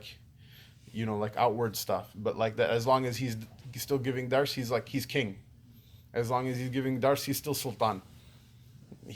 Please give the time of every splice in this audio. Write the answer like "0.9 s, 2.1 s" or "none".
none